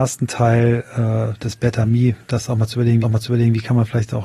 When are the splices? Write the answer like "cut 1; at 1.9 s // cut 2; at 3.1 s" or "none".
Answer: cut 1; at 3.0 s